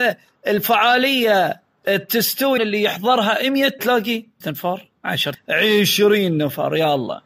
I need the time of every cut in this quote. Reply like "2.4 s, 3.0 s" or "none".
2.6 s, 3.8 s, 4.4 s, 5.3 s